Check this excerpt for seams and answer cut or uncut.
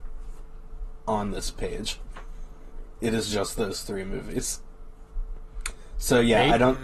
uncut